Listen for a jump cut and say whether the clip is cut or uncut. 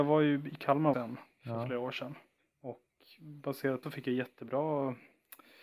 cut